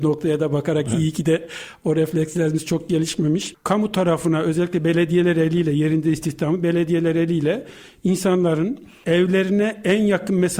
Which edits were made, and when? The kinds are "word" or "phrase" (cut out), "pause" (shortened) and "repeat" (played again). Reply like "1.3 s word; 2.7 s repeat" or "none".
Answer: none